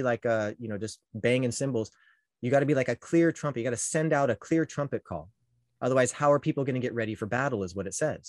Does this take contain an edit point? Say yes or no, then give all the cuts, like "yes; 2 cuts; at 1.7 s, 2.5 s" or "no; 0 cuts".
no; 0 cuts